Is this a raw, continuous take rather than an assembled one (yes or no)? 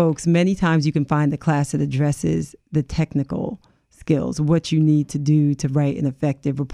yes